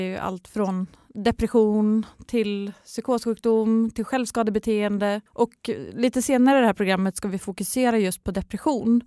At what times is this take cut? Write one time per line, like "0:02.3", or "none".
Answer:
0:05.3